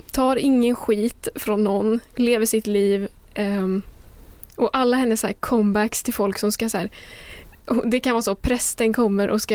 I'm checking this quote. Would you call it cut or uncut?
uncut